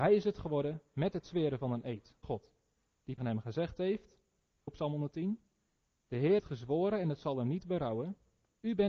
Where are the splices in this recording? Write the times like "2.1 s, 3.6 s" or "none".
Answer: 2.2 s, 3.2 s, 4.7 s, 6.4 s